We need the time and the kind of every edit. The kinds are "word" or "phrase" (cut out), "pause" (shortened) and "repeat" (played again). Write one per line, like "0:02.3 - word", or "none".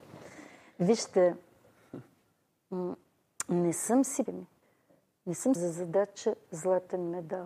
0:04.3 - phrase
0:05.6 - phrase